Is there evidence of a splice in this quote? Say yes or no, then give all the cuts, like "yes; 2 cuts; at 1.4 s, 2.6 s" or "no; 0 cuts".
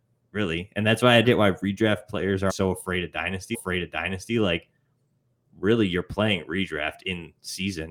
yes; 3 cuts; at 1.2 s, 2.5 s, 3.5 s